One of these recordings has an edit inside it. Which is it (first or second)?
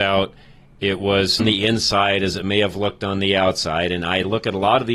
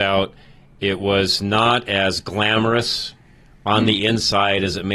first